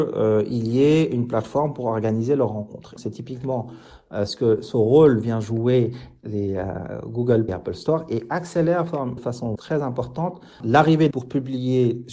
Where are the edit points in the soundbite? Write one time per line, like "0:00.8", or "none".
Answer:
0:03.0
0:06.2
0:07.5
0:09.2
0:09.6
0:11.1